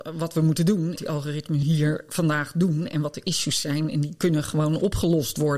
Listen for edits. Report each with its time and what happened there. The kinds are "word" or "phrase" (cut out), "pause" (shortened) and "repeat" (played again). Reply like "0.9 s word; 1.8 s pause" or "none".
1.0 s phrase; 1.6 s word